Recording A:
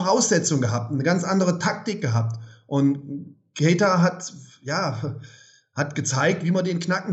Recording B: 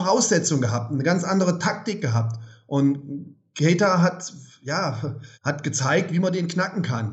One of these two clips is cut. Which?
B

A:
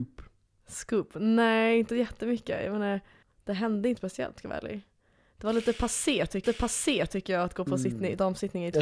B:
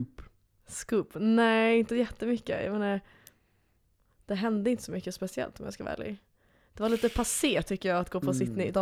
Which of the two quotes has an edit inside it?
A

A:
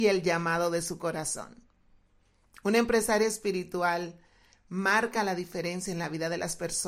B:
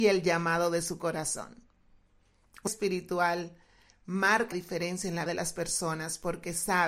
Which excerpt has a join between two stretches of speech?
B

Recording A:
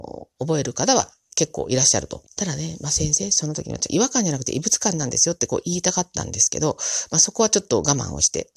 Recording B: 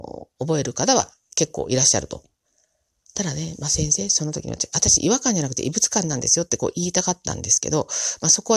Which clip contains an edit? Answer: A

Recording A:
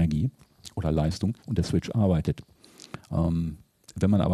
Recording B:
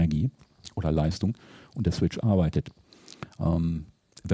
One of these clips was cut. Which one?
A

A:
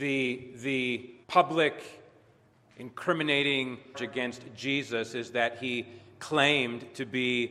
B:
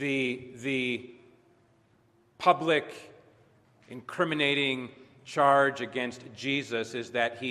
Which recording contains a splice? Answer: A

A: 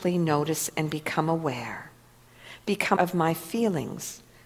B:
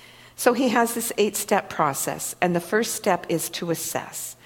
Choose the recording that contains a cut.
A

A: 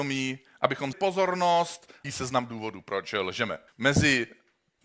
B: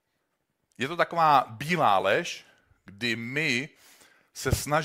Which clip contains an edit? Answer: A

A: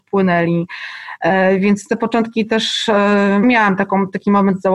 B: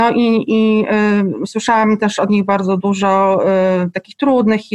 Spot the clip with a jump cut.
A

